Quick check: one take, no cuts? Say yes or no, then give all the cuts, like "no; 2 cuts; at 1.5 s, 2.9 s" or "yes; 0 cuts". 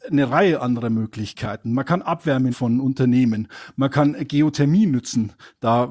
no; 1 cut; at 2.5 s